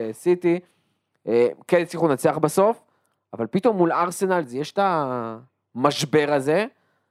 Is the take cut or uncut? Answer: uncut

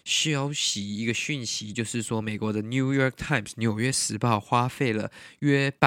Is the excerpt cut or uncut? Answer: uncut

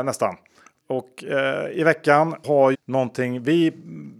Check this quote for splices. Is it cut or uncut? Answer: cut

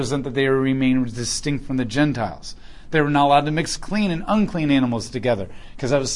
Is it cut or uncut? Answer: uncut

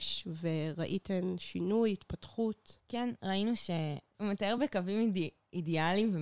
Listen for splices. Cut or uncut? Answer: uncut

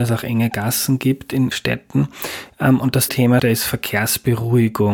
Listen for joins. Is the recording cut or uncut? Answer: cut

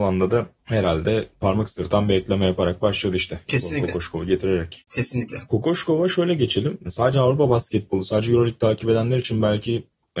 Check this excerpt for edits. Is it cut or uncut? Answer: uncut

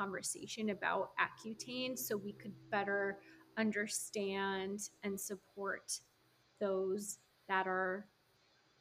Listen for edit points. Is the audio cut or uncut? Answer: uncut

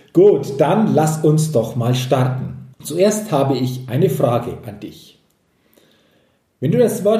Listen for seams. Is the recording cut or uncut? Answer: cut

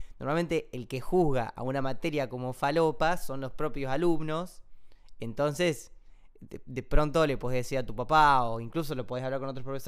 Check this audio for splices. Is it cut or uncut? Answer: uncut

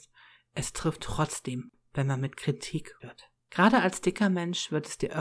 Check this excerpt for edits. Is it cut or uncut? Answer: cut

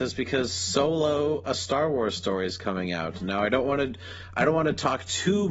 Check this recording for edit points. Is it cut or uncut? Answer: uncut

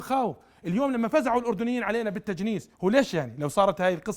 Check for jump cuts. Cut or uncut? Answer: cut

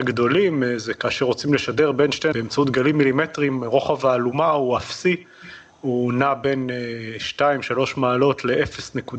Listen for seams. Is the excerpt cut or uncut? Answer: cut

